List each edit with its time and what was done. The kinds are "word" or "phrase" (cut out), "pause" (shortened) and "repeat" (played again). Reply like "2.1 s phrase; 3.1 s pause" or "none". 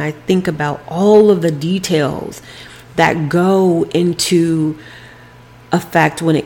none